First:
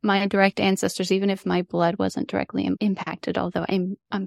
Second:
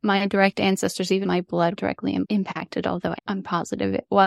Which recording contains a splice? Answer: second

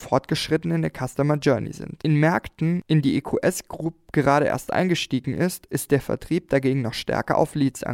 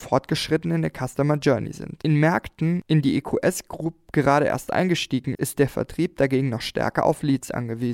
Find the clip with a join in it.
second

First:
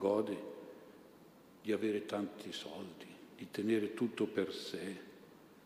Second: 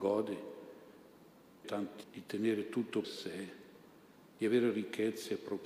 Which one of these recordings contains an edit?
second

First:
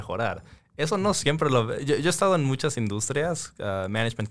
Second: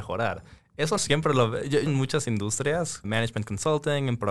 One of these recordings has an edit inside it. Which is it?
second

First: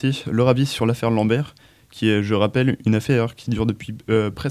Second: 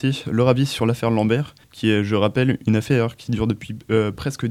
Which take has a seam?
second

